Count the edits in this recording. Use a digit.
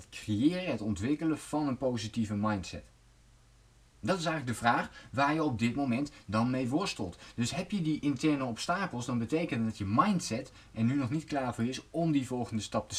0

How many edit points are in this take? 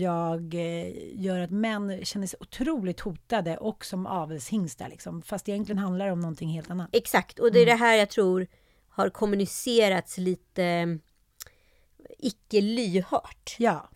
0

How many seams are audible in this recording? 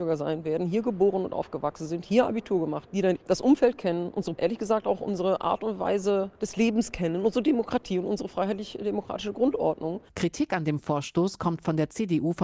4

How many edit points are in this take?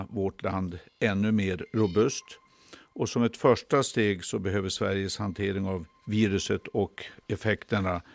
0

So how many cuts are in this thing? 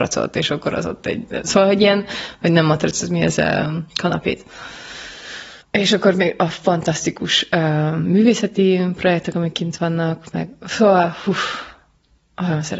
1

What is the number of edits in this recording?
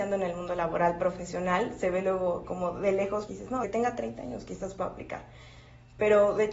2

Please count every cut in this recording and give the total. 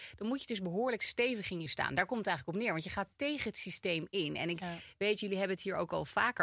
1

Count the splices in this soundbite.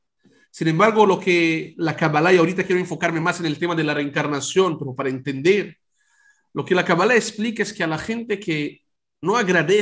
0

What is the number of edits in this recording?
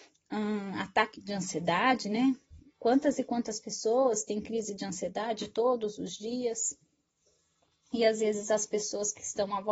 1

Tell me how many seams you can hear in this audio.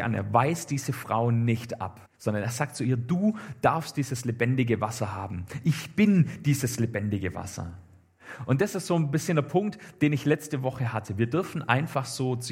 1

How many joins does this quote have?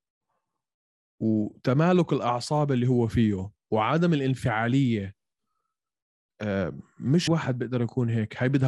1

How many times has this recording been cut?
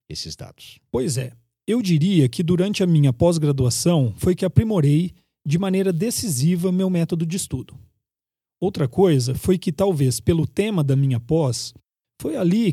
0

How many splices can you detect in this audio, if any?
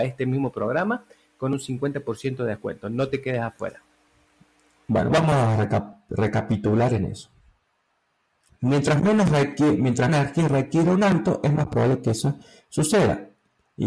2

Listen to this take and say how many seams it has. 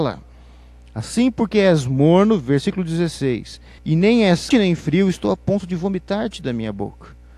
2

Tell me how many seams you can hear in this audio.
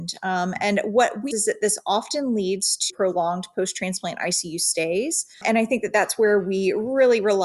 3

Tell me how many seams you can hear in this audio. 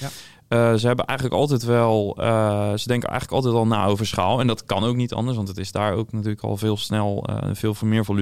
0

